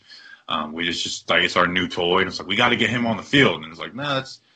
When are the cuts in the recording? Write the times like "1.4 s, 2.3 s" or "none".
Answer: none